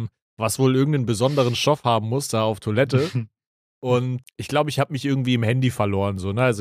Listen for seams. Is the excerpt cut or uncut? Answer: cut